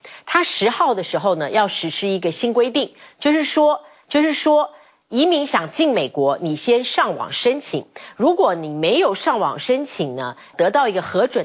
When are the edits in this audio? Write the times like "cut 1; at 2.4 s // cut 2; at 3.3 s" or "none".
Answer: cut 1; at 4.0 s // cut 2; at 10.5 s